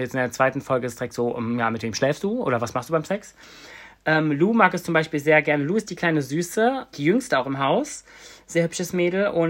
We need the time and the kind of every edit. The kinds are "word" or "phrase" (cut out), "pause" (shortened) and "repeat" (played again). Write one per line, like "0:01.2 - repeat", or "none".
0:06.9 - word